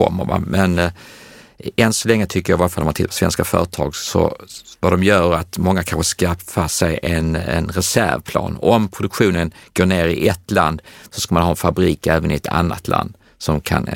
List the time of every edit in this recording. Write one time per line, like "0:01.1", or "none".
none

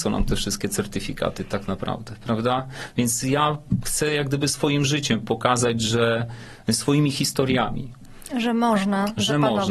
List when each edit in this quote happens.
none

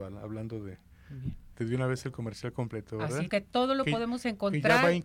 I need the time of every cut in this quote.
0:01.5
0:03.3

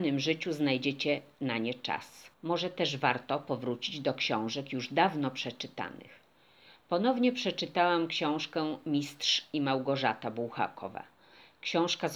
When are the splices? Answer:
0:02.3

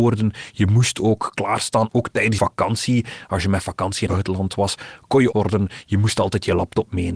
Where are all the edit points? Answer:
0:01.9
0:02.4
0:04.1
0:05.3

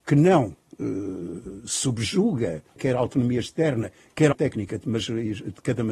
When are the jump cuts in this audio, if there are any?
0:02.8
0:04.3

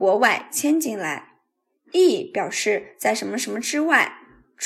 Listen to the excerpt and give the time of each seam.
none

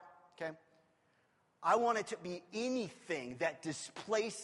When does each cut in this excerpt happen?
none

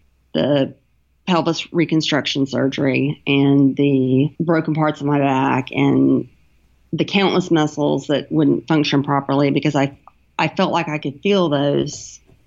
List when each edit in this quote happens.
0:04.4

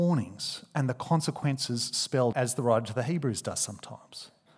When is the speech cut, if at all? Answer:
0:02.3

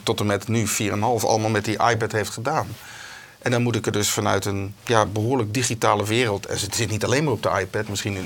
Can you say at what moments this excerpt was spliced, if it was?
0:04.8

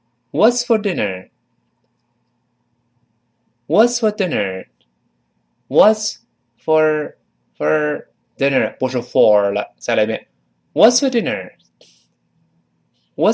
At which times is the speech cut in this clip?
none

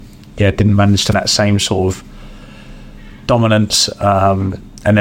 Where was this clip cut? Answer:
0:01.1

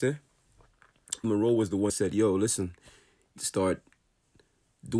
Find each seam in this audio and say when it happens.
0:01.2
0:01.9
0:03.4

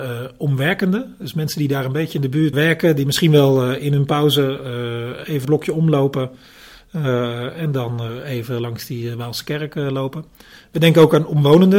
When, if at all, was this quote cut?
0:02.5
0:05.4

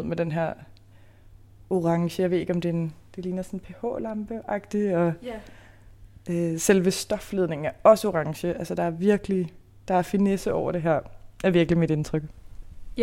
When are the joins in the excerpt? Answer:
none

